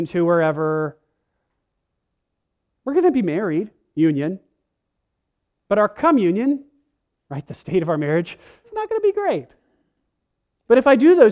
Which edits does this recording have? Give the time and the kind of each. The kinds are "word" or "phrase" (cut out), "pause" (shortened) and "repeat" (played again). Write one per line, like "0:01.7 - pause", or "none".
0:08.6 - word